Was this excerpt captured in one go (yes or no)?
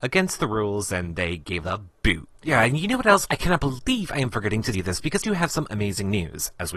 no